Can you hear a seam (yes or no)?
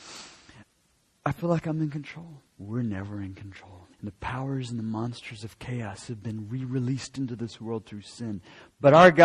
yes